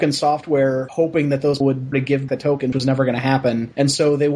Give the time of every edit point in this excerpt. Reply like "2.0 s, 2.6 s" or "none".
1.6 s, 1.9 s, 2.3 s, 2.7 s